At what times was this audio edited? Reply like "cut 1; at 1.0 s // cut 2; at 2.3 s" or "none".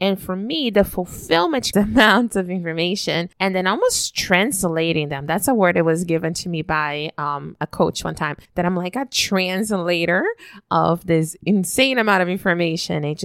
cut 1; at 1.7 s // cut 2; at 3.3 s // cut 3; at 8.4 s

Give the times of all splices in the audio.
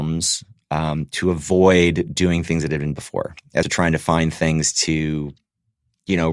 cut 1; at 3.0 s // cut 2; at 3.6 s

